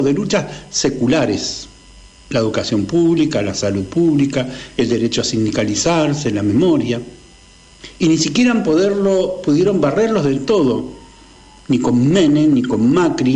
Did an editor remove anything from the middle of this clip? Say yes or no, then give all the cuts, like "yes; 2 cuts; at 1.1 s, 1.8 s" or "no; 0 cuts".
no; 0 cuts